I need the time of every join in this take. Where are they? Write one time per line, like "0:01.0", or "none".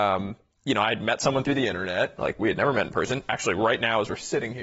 none